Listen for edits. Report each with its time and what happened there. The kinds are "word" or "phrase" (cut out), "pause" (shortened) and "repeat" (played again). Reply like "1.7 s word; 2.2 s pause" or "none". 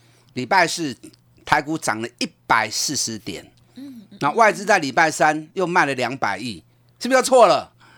none